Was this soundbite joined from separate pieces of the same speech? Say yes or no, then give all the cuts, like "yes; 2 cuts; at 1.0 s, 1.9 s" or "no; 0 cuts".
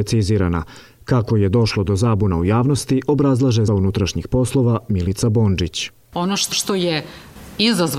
yes; 2 cuts; at 3.7 s, 6.5 s